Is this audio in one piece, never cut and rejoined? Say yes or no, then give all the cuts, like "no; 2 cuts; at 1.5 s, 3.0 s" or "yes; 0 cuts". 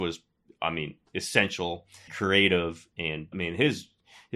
no; 2 cuts; at 2.1 s, 3.3 s